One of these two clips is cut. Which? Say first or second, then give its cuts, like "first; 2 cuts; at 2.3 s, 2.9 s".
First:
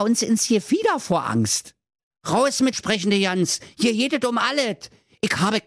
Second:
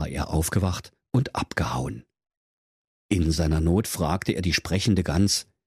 first; 2 cuts; at 2.1 s, 2.7 s